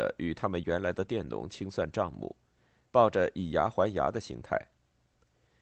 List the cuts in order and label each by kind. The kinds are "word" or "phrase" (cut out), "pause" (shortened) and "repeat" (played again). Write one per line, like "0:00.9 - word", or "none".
none